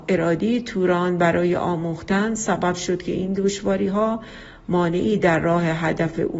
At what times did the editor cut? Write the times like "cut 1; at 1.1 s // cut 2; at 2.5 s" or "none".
none